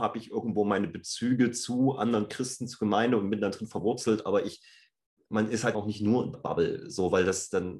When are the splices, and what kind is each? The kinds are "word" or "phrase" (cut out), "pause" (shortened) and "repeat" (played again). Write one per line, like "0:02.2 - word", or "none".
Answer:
0:05.3 - word
0:05.7 - word
0:06.3 - word

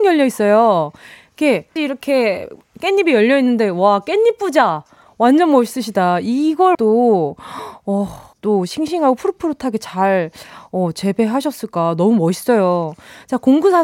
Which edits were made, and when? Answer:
0:01.8 - word
0:06.7 - word
0:08.3 - word

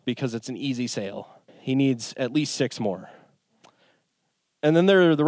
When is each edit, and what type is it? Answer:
0:01.5 - pause

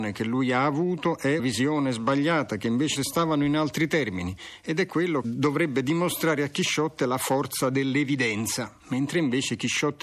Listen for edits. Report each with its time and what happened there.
0:01.4 - word
0:03.0 - phrase
0:05.2 - phrase
0:08.8 - pause

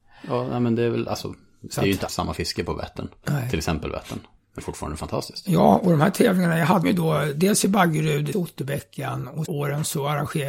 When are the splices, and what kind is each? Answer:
0:02.1 - word
0:04.6 - word
0:06.8 - word
0:08.3 - word
0:09.5 - word

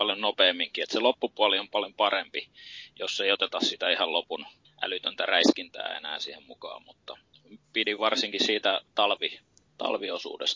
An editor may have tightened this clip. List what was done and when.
none

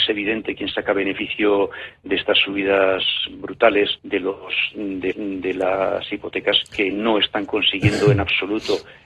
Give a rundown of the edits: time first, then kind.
0:04.0 - pause
0:05.1 - repeat

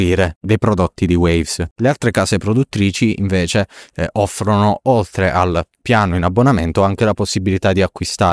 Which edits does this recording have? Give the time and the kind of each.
none

